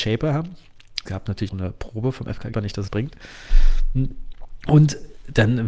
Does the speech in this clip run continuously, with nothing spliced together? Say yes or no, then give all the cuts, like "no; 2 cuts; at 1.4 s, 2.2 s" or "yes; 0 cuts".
no; 4 cuts; at 1.1 s, 1.5 s, 2.5 s, 2.9 s